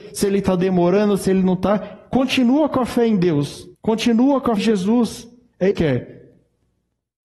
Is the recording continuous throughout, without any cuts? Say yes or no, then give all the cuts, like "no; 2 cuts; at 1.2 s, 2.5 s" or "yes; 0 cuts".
no; 3 cuts; at 3.7 s, 4.6 s, 5.7 s